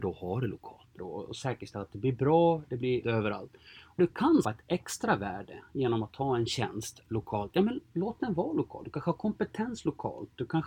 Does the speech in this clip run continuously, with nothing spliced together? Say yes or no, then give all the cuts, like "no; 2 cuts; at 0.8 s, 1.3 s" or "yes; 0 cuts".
no; 4 cuts; at 1.0 s, 3.0 s, 4.0 s, 4.4 s